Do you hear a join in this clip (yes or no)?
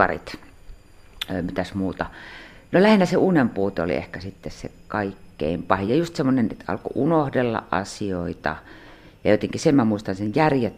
no